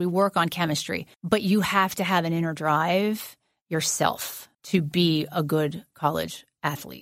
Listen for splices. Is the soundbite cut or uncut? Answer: cut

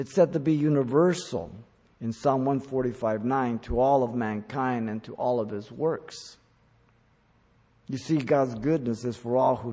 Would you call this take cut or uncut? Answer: uncut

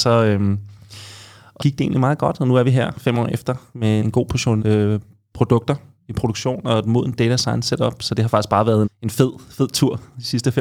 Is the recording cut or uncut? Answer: cut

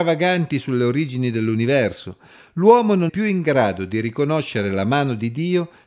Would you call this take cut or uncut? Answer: cut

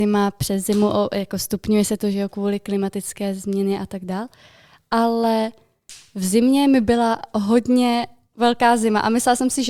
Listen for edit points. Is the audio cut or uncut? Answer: uncut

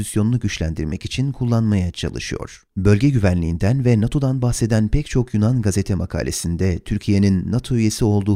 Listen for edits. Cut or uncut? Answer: cut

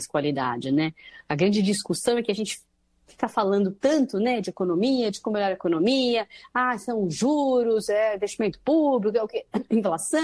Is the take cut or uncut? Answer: uncut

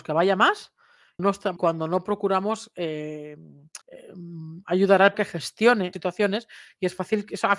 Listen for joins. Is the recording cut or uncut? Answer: cut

